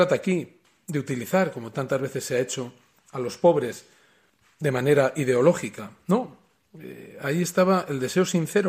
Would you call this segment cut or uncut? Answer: uncut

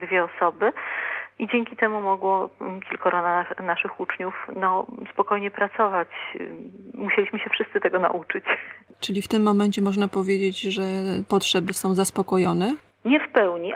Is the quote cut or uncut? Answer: uncut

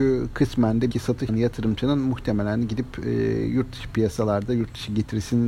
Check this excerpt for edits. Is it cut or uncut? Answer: cut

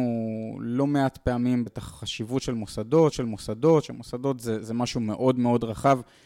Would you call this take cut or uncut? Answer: cut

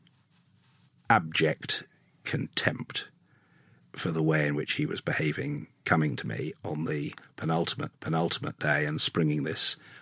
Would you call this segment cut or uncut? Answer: cut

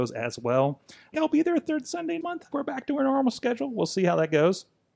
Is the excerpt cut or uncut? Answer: cut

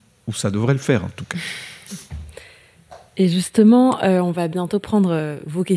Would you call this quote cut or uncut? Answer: uncut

